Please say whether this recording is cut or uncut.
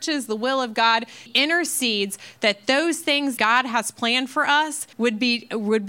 cut